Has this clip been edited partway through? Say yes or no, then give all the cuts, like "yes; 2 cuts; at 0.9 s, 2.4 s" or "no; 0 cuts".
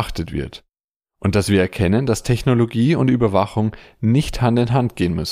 no; 0 cuts